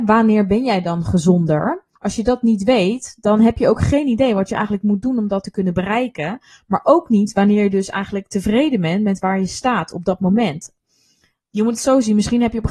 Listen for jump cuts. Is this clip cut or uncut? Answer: cut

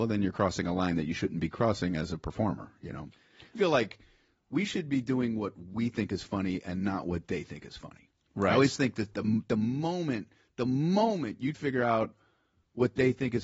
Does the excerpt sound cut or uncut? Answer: cut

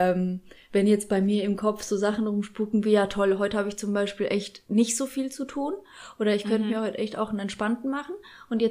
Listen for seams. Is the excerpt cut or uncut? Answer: uncut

